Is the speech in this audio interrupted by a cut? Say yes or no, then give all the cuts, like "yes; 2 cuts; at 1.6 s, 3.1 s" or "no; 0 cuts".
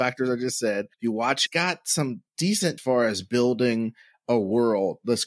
yes; 3 cuts; at 0.9 s, 1.5 s, 2.8 s